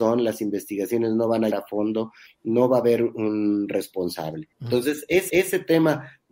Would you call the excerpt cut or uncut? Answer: cut